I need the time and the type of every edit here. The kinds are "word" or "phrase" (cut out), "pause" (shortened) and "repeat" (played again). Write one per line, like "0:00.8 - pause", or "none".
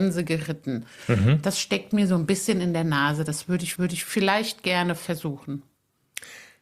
0:03.7 - repeat